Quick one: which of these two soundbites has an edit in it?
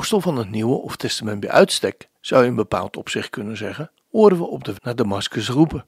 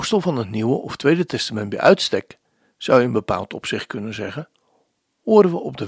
first; 4 cuts; at 1.0 s, 2.2 s, 4.0 s, 4.7 s

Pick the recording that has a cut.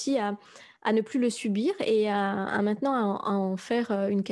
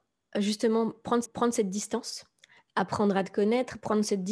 second; 1 cut; at 1.2 s

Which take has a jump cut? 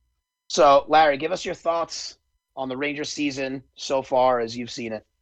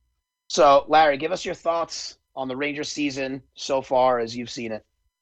second; 1 cut; at 2.2 s

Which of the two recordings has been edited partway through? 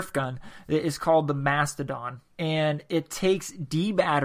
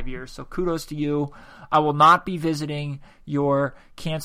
first; 1 cut; at 2.3 s

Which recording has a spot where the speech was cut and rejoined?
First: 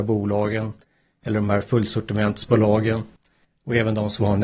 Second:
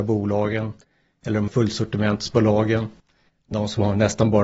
second; 2 cuts; at 1.5 s, 3.5 s

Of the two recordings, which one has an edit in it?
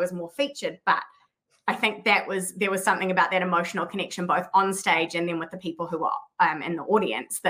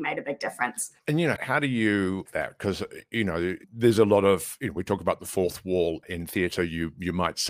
second; 5 cuts; at 1.0 s, 1.4 s, 2.3 s, 3.6 s, 6.0 s

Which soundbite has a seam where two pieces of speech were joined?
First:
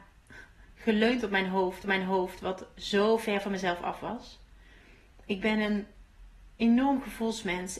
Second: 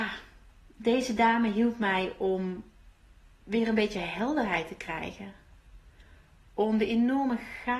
first; 1 cut; at 1.8 s

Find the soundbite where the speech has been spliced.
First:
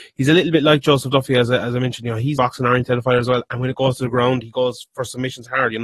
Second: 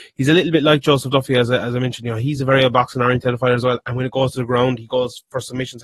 first; 1 cut; at 2.4 s

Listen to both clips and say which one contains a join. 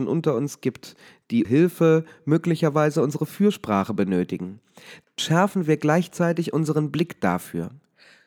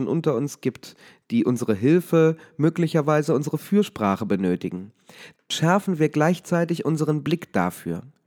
first; 1 cut; at 1.4 s

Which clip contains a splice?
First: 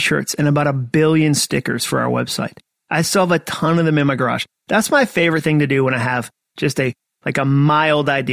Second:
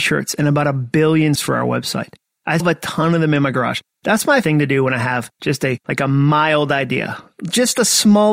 second; 5 cuts; at 1.4 s, 2.6 s, 4.4 s, 5.3 s, 5.8 s

